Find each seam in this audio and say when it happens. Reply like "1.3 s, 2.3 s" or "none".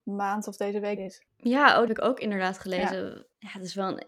1.0 s, 1.3 s, 1.9 s